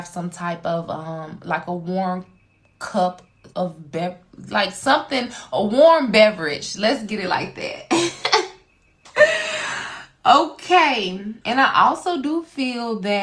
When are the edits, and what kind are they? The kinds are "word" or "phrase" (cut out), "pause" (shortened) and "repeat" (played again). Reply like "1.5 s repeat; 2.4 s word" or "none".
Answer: 3.5 s pause; 11.4 s pause